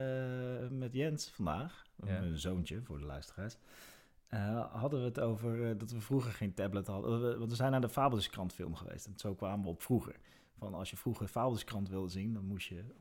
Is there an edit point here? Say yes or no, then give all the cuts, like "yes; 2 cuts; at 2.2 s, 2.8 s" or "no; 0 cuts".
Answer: no; 0 cuts